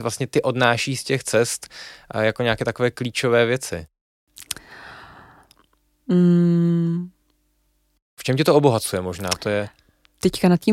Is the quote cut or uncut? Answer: uncut